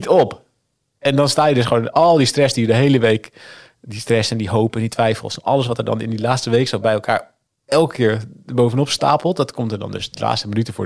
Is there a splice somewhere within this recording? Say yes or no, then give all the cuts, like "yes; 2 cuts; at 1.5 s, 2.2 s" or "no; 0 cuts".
no; 0 cuts